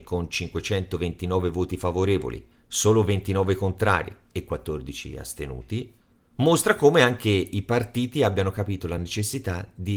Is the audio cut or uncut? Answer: uncut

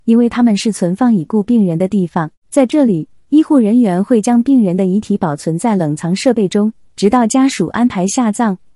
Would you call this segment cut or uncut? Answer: cut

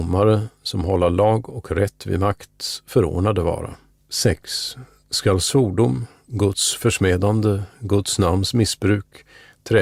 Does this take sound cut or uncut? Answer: cut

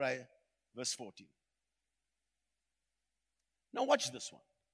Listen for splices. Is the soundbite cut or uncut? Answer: uncut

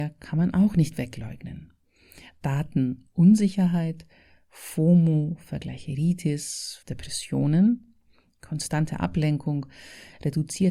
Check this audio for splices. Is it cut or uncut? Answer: cut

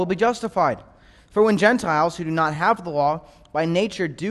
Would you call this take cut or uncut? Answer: uncut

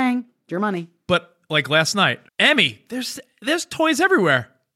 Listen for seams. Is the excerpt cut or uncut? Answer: cut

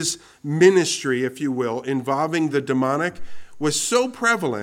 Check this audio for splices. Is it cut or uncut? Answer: uncut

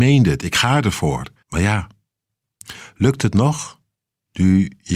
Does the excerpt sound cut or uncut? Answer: cut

